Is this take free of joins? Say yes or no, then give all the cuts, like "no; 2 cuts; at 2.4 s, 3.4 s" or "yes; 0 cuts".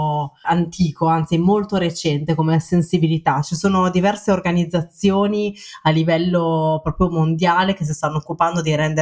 yes; 0 cuts